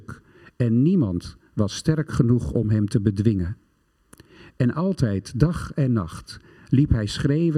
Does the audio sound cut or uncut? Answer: uncut